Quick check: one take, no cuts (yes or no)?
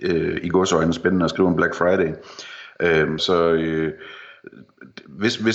no